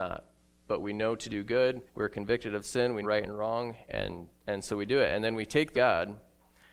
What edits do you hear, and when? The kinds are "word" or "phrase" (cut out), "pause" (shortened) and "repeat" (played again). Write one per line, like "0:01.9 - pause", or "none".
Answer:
0:01.9 - pause
0:03.0 - word
0:04.3 - pause
0:05.7 - phrase